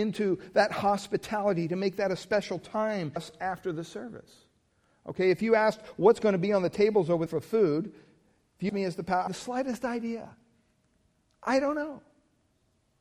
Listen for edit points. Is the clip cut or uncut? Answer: cut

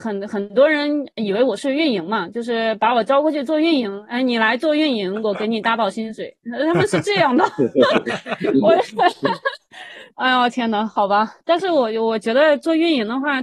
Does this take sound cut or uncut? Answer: cut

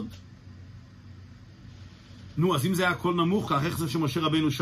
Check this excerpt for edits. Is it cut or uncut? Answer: cut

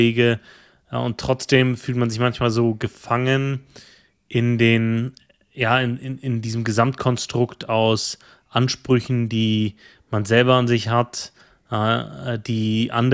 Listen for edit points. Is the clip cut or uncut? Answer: uncut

